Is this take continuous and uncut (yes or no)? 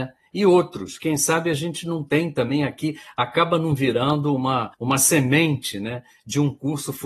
no